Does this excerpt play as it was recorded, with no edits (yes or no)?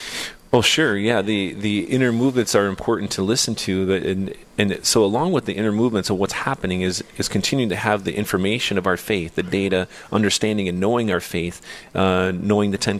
yes